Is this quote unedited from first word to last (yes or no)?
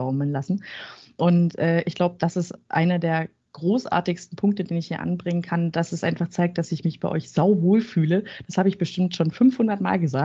yes